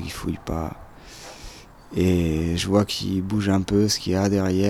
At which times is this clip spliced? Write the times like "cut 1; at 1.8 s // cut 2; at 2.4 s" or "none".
none